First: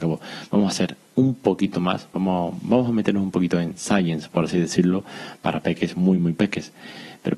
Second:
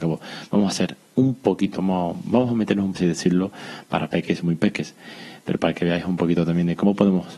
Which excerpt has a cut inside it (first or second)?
second